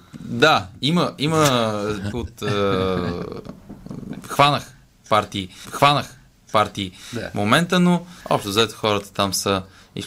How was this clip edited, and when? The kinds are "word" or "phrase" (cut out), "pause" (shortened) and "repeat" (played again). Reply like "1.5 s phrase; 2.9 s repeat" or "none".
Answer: 2.1 s phrase; 5.6 s repeat; 8.2 s pause